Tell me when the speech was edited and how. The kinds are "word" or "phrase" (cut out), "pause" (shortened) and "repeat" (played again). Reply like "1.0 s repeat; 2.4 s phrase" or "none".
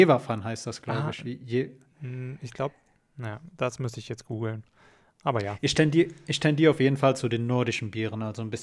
none

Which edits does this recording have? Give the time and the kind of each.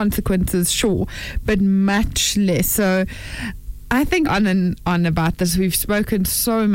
4.2 s phrase

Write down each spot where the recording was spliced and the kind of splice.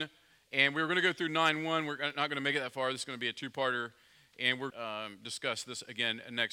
4.7 s phrase

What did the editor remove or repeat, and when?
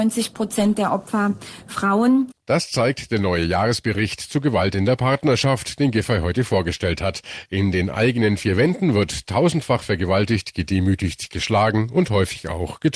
none

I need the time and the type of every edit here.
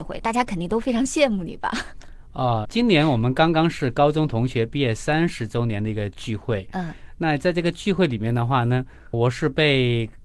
2.6 s word; 9.1 s phrase

